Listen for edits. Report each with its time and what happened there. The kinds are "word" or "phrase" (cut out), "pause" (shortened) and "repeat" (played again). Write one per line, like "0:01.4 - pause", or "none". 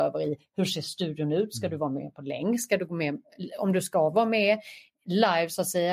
none